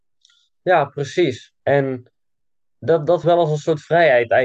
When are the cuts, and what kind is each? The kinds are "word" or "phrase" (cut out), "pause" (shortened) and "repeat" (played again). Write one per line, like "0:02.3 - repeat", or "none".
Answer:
0:01.6 - pause
0:03.2 - word

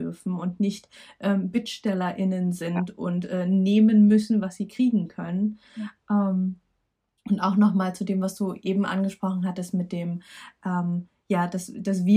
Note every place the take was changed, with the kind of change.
none

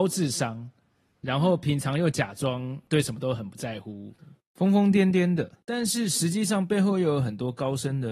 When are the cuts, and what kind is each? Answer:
0:05.6 - pause

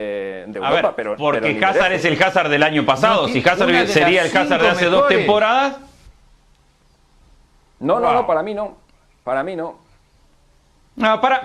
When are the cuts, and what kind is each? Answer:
none

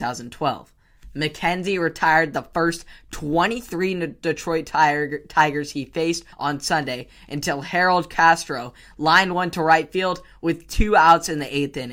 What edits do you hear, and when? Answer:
0:06.3 - pause

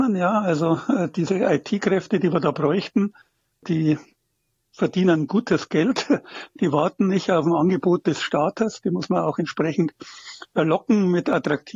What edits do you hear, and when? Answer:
none

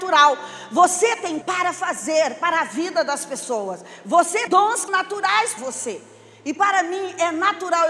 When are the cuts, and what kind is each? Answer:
0:01.4 - word
0:04.5 - word
0:04.9 - word
0:05.6 - word

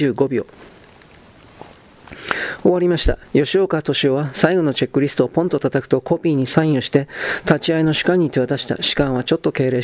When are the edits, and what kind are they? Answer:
0:03.2 - pause

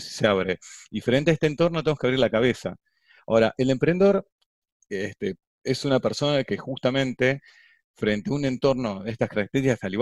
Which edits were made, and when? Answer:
none

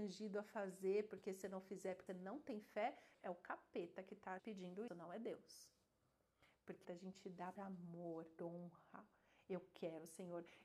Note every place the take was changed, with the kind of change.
0:01.4 - word
0:02.1 - word
0:03.1 - word
0:04.4 - word
0:04.9 - word
0:06.8 - word
0:07.6 - word
0:08.4 - word

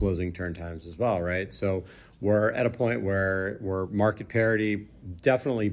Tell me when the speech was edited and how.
none

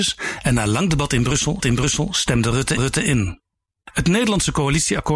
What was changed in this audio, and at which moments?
0:01.6 - repeat
0:02.8 - repeat

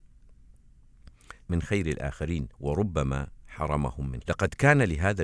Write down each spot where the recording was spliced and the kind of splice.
0:01.4 - phrase
0:02.5 - pause
0:04.2 - word

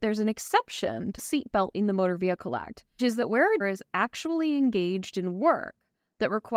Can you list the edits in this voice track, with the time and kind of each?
0:01.2 - word
0:01.7 - word
0:03.0 - word
0:03.6 - word

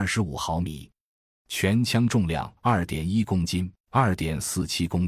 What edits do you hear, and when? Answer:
0:02.6 - pause
0:03.8 - pause

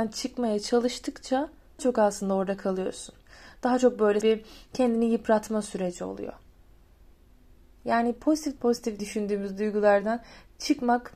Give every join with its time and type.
0:01.8 - word
0:04.2 - word
0:08.6 - word
0:09.0 - word

